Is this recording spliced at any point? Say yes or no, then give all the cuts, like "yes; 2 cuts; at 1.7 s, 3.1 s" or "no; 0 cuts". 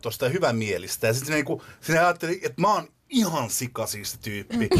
no; 0 cuts